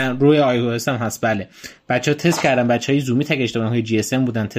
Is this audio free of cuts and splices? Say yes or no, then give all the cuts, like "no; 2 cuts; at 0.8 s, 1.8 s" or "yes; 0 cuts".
yes; 0 cuts